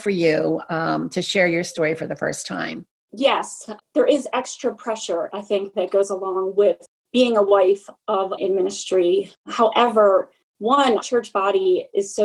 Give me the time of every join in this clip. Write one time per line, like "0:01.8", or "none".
0:08.4
0:11.0